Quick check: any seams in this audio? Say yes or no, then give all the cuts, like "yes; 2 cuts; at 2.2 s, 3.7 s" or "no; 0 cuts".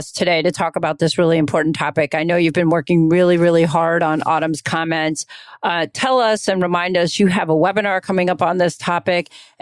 no; 0 cuts